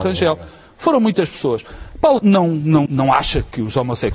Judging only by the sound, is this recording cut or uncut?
cut